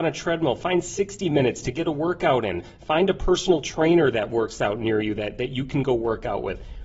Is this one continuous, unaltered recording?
yes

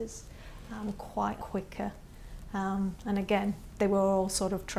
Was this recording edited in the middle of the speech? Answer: yes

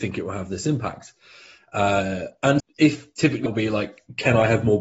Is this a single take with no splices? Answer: no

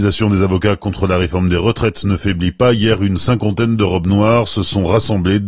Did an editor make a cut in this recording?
no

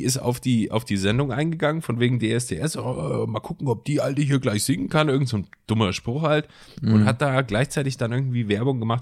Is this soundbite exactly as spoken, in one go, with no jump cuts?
yes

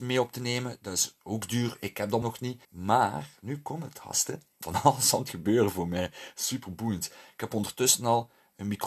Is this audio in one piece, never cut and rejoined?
no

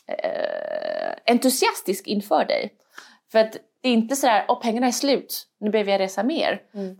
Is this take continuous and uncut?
yes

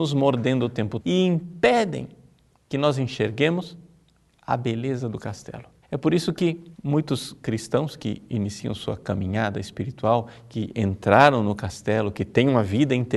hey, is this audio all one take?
no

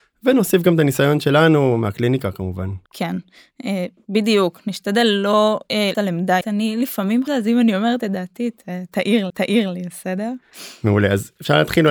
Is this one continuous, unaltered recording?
no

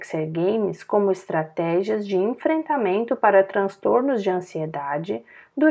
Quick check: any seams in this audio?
no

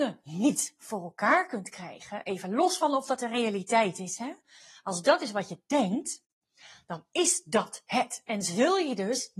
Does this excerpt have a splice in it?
no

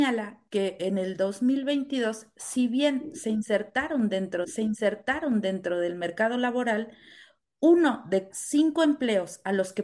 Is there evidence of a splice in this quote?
yes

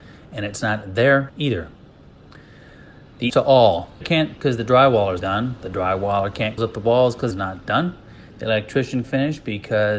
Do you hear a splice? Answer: yes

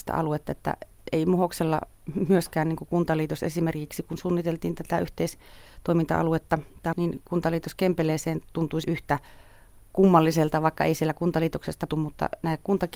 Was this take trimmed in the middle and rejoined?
yes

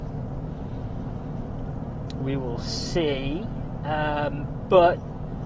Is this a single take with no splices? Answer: no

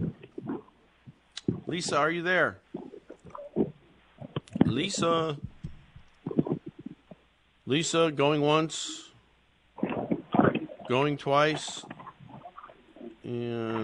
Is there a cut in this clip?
no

